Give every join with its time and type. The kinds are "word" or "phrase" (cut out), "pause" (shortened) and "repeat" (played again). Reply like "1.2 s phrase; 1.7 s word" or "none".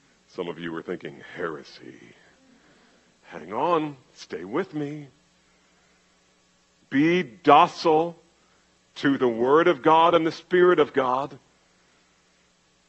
none